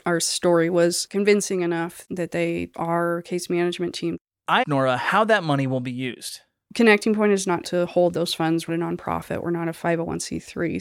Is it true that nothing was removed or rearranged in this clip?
no; 4 cuts; at 2.7 s, 4.6 s, 7.6 s, 8.7 s

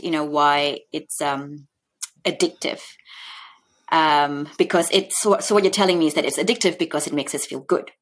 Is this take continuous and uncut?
yes; 0 cuts

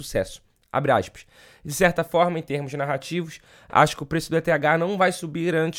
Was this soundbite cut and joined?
no; 0 cuts

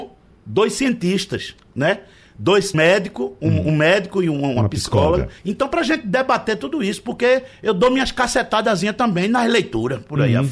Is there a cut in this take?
yes; 2 cuts; at 2.7 s, 5.4 s

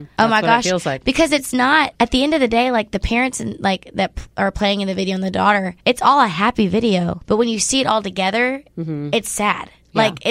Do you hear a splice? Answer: yes; 1 cut; at 5.8 s

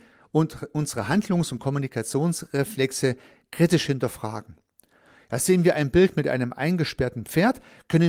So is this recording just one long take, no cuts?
yes; 0 cuts

